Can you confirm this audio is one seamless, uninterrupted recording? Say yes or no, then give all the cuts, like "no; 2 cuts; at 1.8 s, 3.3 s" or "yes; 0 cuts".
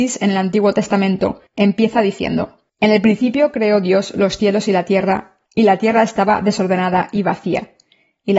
no; 3 cuts; at 1.5 s, 2.7 s, 5.4 s